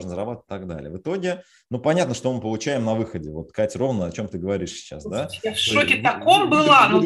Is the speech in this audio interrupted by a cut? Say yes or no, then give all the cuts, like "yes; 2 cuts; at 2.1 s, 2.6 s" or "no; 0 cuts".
no; 0 cuts